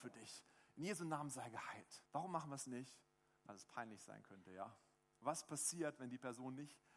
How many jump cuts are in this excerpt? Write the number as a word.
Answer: one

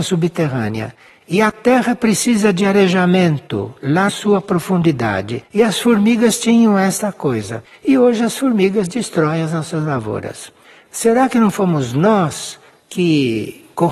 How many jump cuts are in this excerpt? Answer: two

